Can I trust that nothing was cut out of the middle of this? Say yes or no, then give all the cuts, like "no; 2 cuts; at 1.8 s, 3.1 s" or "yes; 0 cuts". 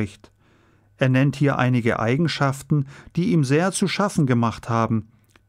yes; 0 cuts